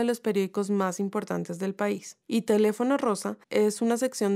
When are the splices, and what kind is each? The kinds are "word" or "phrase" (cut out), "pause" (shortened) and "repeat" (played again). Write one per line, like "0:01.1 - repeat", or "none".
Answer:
0:02.2 - pause
0:03.4 - pause